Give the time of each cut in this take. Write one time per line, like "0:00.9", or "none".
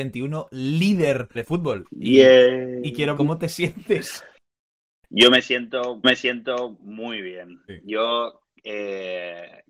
0:01.3
0:03.2
0:06.0